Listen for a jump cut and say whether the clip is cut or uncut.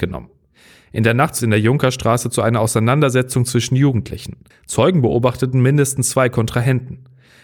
cut